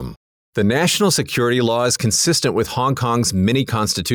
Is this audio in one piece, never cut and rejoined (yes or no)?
yes